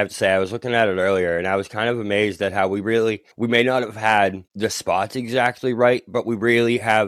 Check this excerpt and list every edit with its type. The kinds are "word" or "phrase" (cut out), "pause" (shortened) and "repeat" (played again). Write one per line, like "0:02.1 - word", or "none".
0:03.3 - pause
0:04.5 - pause